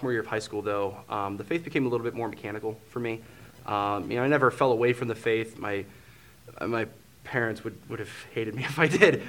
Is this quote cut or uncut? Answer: uncut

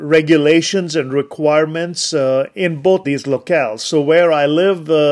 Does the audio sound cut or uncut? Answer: cut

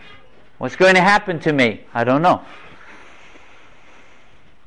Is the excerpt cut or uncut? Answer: uncut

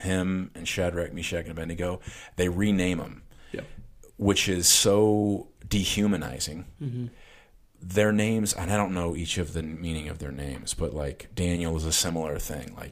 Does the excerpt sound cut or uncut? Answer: uncut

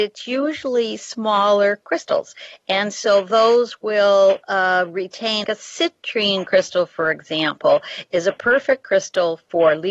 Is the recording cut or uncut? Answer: cut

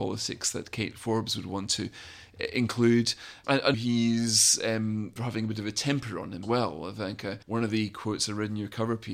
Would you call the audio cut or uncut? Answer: cut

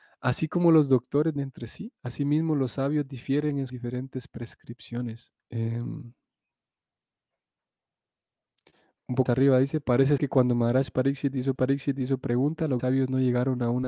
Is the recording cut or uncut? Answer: cut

